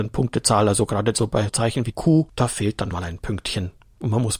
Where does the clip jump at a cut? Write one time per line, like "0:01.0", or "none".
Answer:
0:01.5
0:01.9
0:02.9